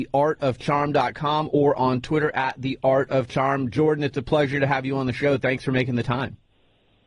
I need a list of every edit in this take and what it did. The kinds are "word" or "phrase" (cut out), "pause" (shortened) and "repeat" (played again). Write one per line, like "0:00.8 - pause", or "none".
none